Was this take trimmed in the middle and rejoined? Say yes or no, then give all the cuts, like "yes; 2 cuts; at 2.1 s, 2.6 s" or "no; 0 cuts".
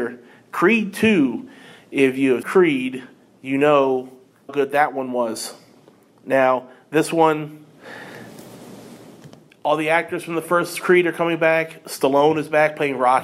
yes; 2 cuts; at 2.4 s, 4.5 s